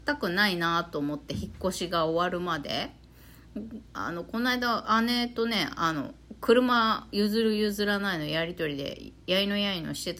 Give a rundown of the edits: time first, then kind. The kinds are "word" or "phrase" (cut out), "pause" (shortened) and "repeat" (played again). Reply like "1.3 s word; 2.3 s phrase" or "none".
3.9 s pause